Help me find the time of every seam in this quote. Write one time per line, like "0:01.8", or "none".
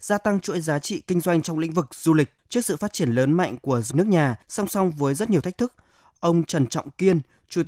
0:02.4
0:03.9
0:04.4